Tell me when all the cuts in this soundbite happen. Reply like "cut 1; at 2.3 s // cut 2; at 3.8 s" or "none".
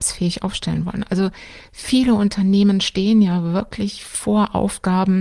none